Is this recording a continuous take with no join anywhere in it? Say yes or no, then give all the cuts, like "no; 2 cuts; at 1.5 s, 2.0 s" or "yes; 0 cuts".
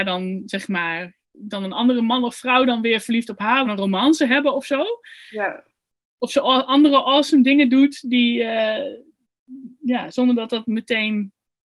no; 2 cuts; at 1.2 s, 3.6 s